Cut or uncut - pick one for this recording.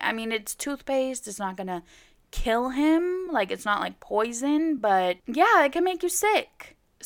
uncut